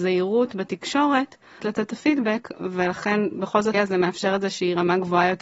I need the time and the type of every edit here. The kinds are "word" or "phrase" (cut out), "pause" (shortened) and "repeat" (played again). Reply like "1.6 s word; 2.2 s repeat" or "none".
1.6 s word; 3.7 s word